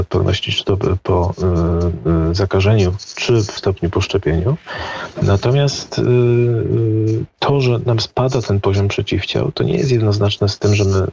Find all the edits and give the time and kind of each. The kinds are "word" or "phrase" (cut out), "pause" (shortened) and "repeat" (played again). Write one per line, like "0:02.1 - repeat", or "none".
0:03.6 - word